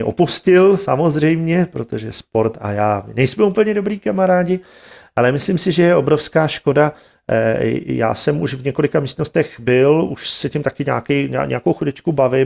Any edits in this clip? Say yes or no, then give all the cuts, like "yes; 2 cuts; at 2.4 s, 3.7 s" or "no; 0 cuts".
no; 0 cuts